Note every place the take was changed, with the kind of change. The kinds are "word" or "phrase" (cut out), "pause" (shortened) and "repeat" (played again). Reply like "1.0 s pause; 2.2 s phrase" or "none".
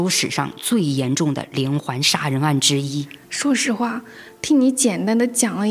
3.2 s pause

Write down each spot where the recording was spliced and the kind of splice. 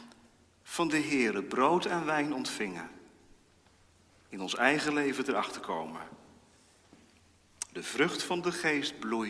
none

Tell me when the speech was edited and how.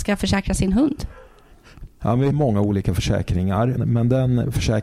2.3 s word; 3.8 s word

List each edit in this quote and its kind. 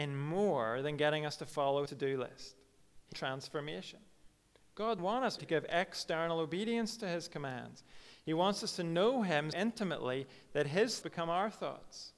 1.9 s word; 3.1 s word; 5.0 s word; 5.4 s word; 9.5 s word; 11.0 s word

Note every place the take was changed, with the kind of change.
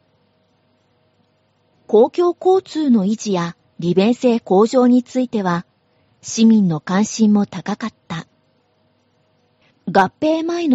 none

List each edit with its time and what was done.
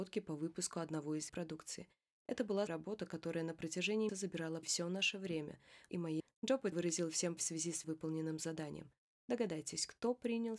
1.3 s word; 2.7 s word; 4.1 s word; 4.6 s word; 5.9 s word; 6.7 s word; 7.4 s word; 7.8 s word

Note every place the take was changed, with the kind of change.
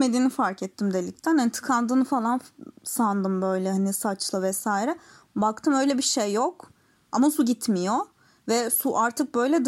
none

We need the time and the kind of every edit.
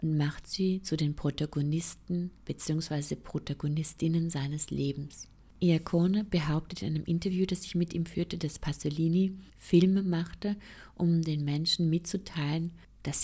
2.4 s pause; 9.5 s pause

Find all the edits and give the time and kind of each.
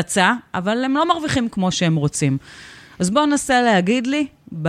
none

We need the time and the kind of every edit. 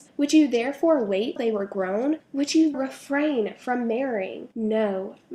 1.4 s word; 2.7 s word

